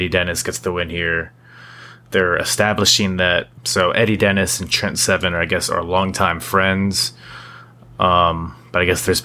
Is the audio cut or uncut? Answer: uncut